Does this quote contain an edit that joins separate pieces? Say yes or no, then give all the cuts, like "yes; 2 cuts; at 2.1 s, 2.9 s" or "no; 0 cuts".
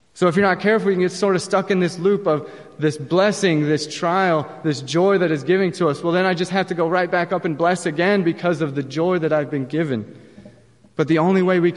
no; 0 cuts